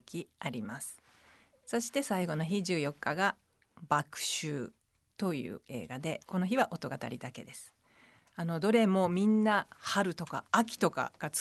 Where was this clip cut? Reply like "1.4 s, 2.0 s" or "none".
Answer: none